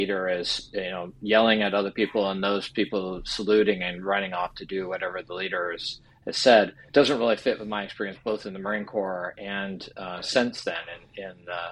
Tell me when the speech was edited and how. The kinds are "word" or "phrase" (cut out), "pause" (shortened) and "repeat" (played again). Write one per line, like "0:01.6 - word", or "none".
0:06.9 - pause

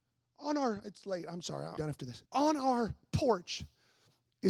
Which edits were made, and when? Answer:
0:01.8 - phrase
0:02.3 - pause

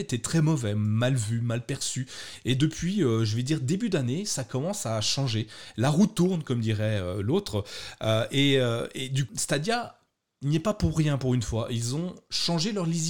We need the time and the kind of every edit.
0:09.3 - word

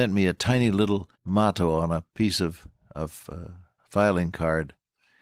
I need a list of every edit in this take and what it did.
0:01.1 - pause
0:03.8 - pause

